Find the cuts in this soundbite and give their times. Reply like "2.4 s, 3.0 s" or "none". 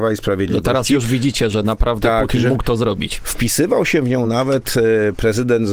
none